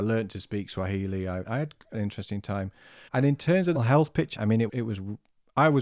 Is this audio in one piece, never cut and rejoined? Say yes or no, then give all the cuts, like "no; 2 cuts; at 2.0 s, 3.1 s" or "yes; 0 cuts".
no; 6 cuts; at 1.4 s, 1.9 s, 3.1 s, 3.7 s, 4.3 s, 4.7 s